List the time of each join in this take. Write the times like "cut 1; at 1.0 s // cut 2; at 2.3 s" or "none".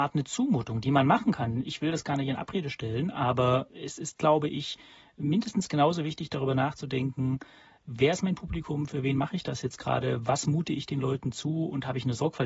none